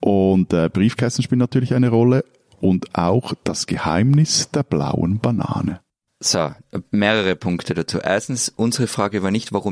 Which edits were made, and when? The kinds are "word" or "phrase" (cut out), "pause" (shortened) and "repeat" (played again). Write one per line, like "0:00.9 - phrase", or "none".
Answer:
none